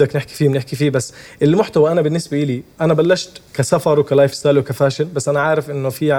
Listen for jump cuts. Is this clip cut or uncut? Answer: cut